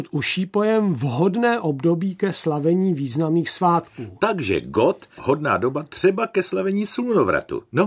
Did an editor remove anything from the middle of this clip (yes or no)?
yes